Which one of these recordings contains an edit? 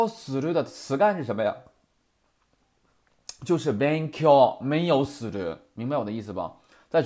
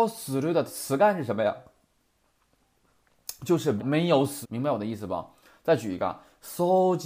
second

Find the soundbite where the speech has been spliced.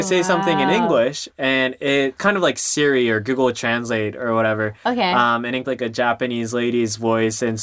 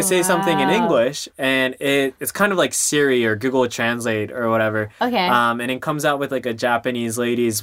first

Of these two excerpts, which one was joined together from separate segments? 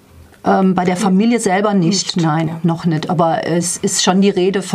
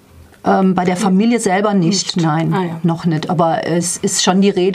first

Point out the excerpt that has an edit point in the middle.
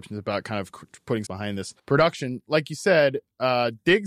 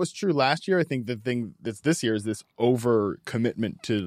first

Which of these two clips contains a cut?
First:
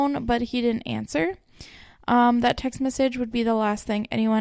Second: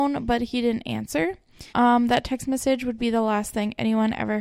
second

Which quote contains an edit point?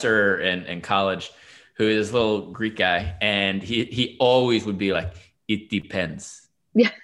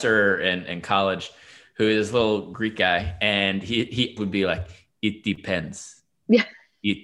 second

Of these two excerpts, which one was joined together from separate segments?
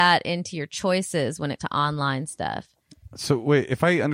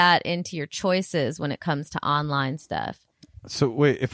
first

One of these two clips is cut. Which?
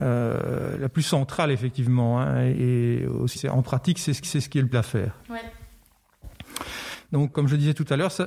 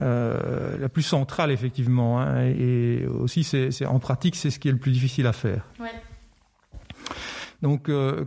first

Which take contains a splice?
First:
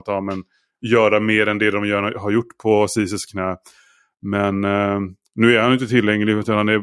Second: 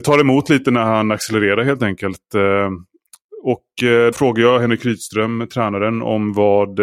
second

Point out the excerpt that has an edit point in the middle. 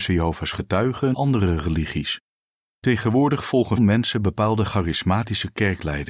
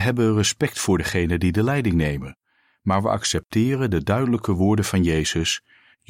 first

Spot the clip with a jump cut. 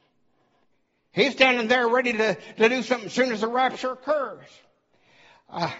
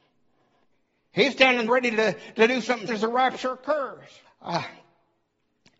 second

